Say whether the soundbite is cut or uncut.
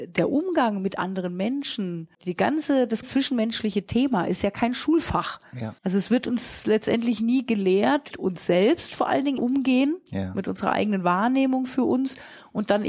cut